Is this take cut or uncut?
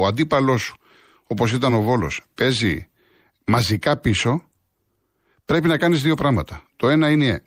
uncut